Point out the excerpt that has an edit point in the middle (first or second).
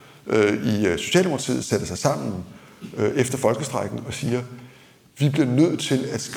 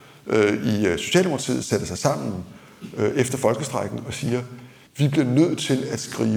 second